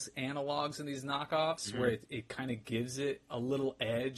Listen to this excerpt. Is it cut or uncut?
uncut